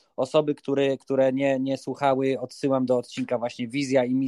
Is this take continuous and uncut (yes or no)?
yes